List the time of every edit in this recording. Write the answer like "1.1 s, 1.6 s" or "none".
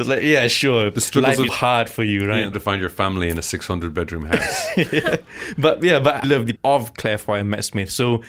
1.5 s, 2.5 s, 6.2 s, 6.6 s